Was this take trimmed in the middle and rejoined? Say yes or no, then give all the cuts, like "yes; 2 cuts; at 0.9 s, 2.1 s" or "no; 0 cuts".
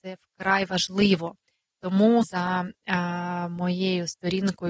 yes; 1 cut; at 2.2 s